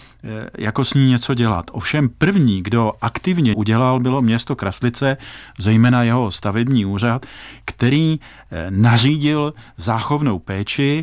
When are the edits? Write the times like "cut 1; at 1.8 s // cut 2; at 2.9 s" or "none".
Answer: cut 1; at 3.5 s